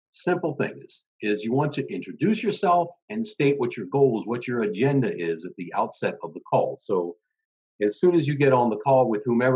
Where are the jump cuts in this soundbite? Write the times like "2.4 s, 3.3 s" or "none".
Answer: none